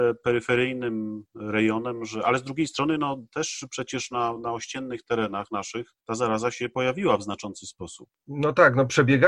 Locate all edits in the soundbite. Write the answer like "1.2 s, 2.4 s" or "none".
6.0 s